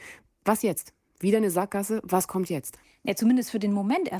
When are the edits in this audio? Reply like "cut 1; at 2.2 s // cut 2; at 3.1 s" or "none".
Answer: cut 1; at 2.8 s